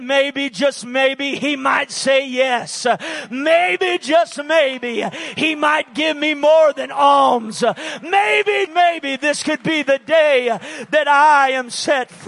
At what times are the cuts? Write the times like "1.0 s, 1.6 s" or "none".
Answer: 8.7 s